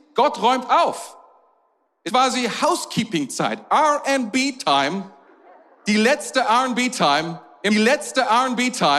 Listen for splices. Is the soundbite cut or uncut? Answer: cut